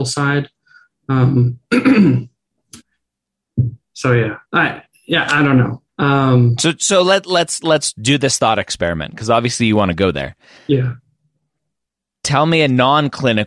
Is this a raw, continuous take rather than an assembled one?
no; 4 cuts; at 2.8 s, 4.4 s, 5.9 s, 10.6 s

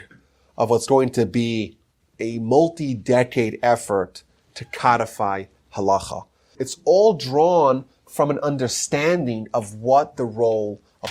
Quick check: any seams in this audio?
no; 0 cuts

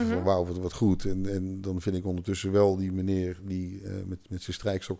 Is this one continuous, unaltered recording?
yes; 0 cuts

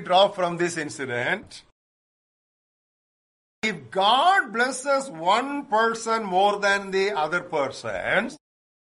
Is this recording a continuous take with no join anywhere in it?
yes; 0 cuts

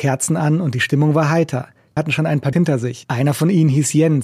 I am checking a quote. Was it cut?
yes; 2 cuts; at 2.0 s, 2.5 s

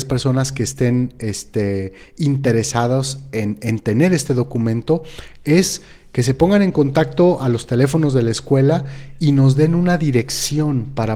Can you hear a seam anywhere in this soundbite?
no; 0 cuts

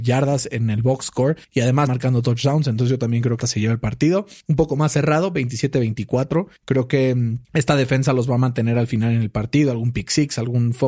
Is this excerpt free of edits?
no; 6 cuts; at 1.4 s, 1.9 s, 3.4 s, 4.4 s, 6.6 s, 7.4 s

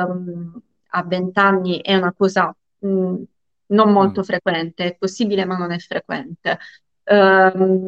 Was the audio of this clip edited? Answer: no; 0 cuts

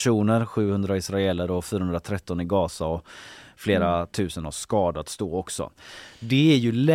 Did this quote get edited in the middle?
no; 0 cuts

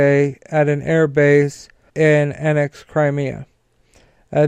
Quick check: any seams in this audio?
yes; 1 cut; at 1.9 s

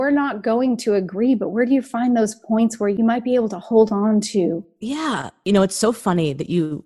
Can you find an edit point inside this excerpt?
no; 0 cuts

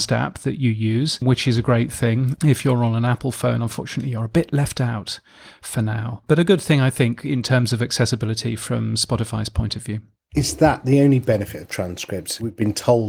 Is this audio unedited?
yes; 0 cuts

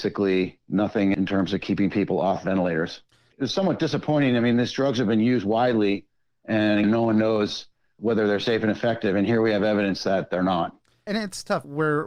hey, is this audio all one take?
no; 1 cut; at 6.8 s

